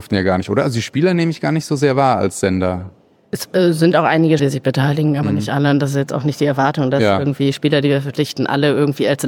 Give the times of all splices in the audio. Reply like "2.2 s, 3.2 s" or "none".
4.4 s